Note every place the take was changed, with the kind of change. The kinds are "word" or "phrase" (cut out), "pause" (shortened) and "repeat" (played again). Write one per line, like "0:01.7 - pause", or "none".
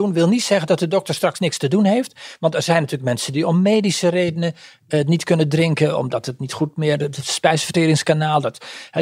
none